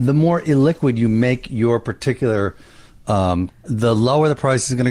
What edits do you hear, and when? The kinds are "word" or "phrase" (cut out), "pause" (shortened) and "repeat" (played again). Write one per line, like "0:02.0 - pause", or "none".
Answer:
0:03.5 - word

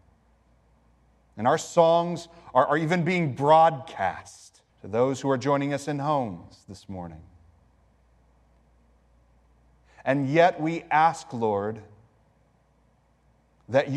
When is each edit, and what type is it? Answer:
0:04.7 - pause

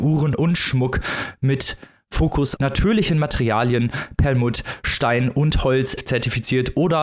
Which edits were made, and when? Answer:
0:02.6 - word
0:06.0 - word

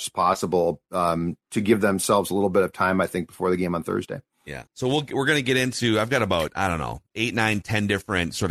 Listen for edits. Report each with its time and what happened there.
0:01.4 - pause
0:04.7 - pause
0:07.1 - pause

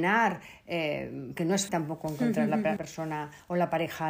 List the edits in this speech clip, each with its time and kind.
0:01.4 - word
0:01.7 - word
0:02.8 - word

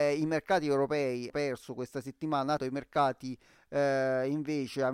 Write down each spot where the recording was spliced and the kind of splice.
0:01.3 - word
0:02.6 - word

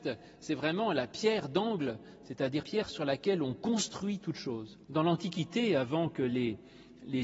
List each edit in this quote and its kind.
0:02.6 - word
0:04.8 - pause

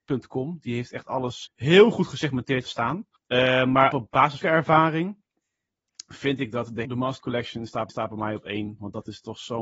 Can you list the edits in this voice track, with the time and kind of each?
0:01.5 - word
0:02.7 - word
0:03.2 - pause
0:03.9 - word
0:04.4 - phrase
0:06.8 - word
0:07.2 - word
0:07.9 - repeat

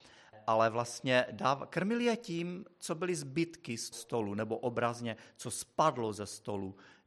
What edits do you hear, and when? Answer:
0:03.9 - word

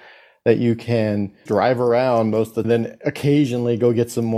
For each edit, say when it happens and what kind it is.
0:01.5 - word
0:02.6 - word

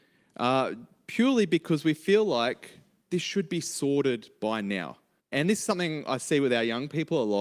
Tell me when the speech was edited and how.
0:05.2 - pause

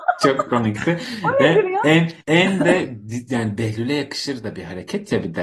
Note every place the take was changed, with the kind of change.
0:02.2 - pause

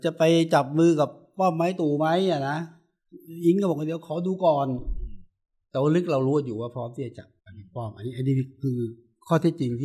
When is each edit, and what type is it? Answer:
0:07.4 - pause

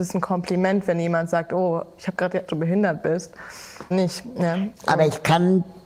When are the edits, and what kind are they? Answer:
0:02.5 - phrase
0:03.9 - word

